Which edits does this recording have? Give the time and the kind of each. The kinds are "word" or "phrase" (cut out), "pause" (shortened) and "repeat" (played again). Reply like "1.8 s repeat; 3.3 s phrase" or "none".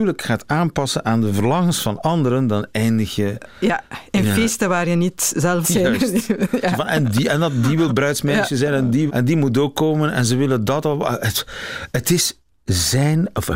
5.6 s phrase; 9.1 s phrase